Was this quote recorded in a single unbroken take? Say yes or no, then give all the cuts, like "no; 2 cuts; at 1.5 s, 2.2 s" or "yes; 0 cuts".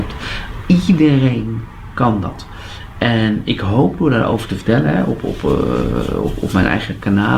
yes; 0 cuts